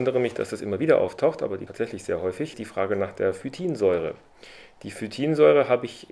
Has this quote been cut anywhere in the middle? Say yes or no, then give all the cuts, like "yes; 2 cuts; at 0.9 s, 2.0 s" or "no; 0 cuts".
yes; 2 cuts; at 1.7 s, 2.5 s